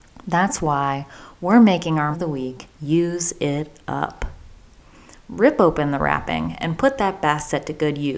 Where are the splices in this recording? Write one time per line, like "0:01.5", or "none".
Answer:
0:02.1
0:02.7